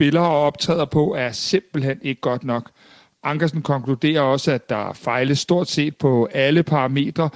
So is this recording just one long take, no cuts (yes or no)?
yes